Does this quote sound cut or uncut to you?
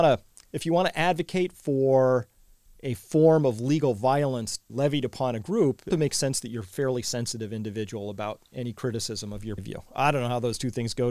cut